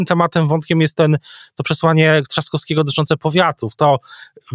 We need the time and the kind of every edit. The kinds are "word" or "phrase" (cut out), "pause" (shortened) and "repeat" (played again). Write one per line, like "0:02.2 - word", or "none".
none